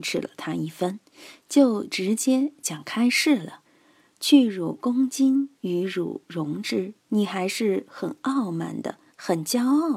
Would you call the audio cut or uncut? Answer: cut